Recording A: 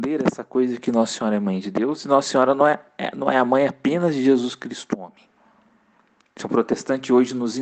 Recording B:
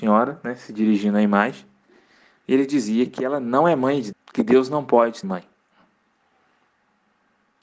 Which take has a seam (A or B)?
B